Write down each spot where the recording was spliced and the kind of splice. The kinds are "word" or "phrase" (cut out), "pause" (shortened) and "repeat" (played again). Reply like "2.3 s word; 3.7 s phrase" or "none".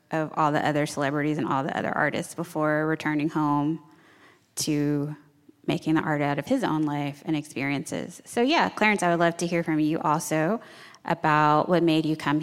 none